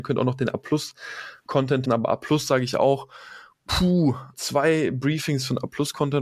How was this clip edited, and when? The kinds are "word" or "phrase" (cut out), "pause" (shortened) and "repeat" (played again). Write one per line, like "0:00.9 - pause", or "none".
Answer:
0:01.9 - word
0:04.3 - word